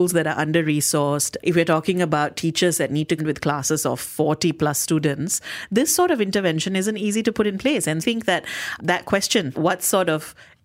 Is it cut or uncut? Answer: cut